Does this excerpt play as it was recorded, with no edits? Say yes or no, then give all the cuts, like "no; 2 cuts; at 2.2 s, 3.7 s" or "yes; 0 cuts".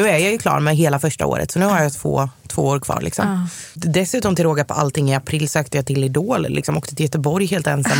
yes; 0 cuts